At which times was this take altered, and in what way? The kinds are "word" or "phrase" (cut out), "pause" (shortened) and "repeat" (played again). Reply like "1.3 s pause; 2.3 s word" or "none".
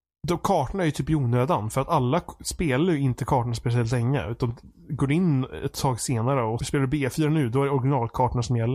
6.6 s word